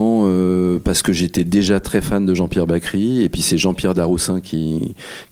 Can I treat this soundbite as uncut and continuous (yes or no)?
no